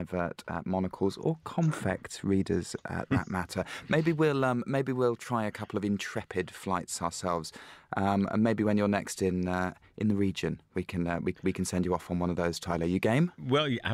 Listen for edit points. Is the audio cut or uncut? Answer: uncut